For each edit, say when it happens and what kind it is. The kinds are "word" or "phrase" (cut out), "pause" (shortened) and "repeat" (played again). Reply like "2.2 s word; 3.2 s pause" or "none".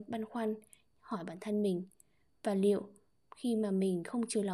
none